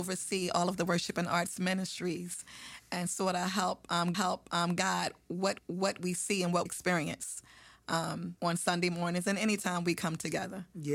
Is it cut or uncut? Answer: cut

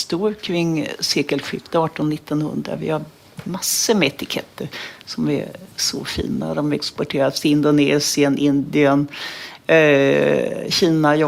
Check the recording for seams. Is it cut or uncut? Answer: uncut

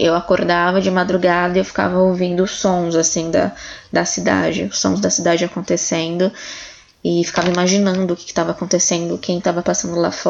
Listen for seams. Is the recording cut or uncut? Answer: uncut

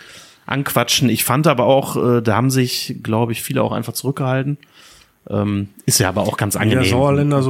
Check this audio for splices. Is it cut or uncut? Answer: uncut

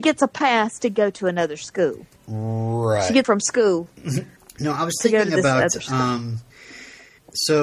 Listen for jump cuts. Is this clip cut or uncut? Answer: cut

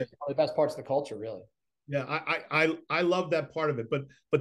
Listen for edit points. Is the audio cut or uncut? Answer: uncut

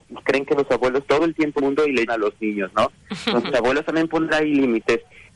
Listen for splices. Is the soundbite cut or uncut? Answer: cut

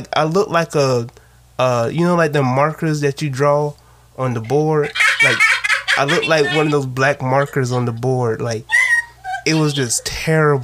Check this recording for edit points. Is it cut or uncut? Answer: uncut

